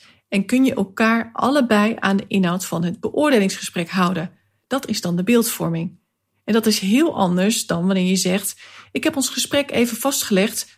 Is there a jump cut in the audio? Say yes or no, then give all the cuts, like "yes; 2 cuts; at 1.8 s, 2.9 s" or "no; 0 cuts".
no; 0 cuts